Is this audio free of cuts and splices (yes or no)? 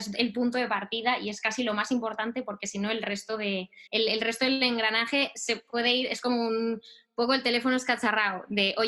no